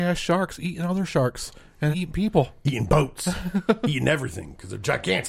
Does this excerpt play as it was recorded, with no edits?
no; 1 cut; at 1.9 s

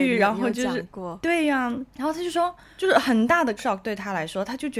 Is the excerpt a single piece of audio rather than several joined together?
no; 2 cuts; at 1.9 s, 3.6 s

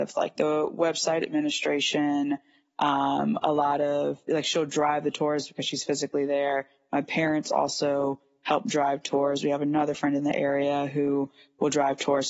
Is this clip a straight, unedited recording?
yes; 0 cuts

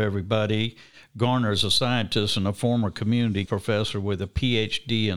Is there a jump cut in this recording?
yes; 1 cut; at 3.5 s

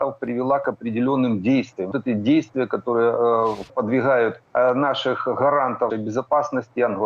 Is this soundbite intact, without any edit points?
no; 4 cuts; at 1.9 s, 3.7 s, 4.5 s, 5.9 s

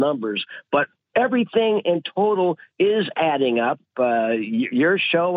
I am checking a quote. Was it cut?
no; 0 cuts

